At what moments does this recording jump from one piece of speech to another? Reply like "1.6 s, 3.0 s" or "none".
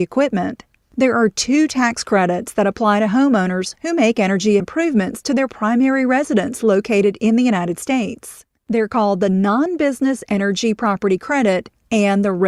4.6 s